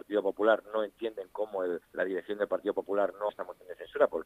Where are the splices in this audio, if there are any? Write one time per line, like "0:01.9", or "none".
0:01.8
0:03.3